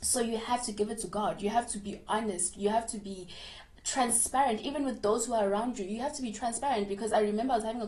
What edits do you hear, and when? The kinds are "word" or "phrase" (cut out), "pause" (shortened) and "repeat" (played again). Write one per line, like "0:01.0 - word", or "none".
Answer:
none